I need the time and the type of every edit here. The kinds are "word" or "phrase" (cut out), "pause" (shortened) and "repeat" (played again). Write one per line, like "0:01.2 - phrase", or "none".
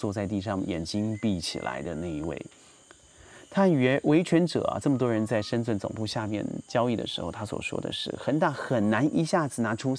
none